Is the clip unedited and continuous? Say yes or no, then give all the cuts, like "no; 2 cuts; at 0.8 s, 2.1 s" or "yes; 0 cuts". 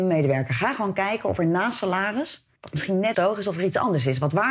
no; 2 cuts; at 2.6 s, 3.1 s